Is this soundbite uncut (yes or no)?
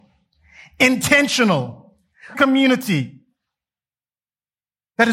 no